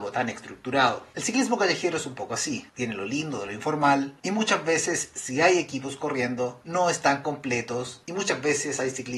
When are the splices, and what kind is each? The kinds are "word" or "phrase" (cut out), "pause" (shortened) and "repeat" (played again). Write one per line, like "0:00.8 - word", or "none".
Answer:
none